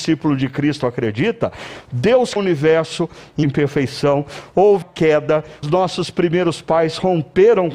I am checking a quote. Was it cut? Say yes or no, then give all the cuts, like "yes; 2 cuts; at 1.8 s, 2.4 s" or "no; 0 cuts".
yes; 4 cuts; at 2.4 s, 3.4 s, 4.8 s, 5.6 s